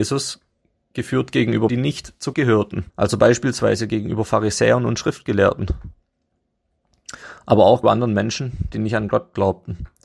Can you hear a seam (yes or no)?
yes